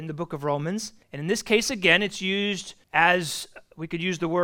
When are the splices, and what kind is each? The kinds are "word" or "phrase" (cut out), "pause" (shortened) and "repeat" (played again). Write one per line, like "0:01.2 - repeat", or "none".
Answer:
0:01.0 - pause
0:02.8 - pause